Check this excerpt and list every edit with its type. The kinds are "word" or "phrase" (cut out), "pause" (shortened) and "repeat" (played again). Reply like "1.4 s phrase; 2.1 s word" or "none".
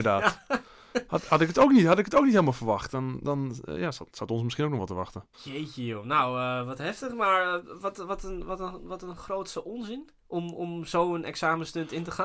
5.3 s pause; 10.2 s pause